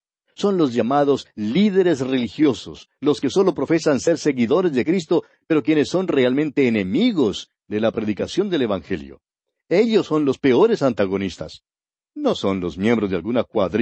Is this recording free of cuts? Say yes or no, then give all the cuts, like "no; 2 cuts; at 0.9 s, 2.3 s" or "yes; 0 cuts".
yes; 0 cuts